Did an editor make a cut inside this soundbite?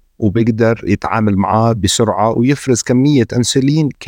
no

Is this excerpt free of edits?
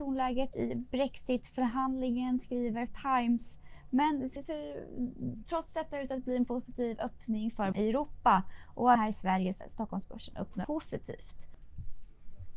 no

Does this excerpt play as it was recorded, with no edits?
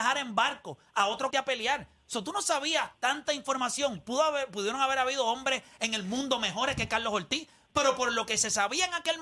no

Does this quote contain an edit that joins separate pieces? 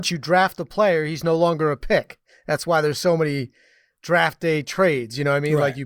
no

